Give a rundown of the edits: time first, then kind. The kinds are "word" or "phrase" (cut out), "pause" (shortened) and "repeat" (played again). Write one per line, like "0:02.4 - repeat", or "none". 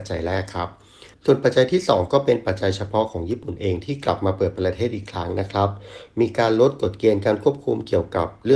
0:01.1 - pause